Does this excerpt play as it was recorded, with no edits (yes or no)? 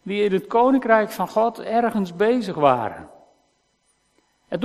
yes